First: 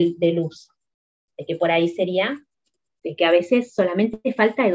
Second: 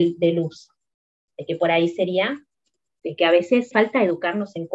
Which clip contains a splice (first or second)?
second